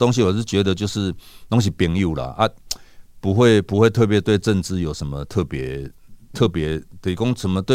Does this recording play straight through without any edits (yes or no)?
no